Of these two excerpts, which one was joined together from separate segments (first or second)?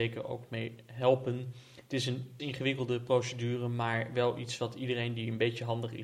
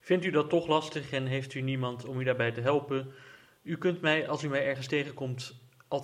first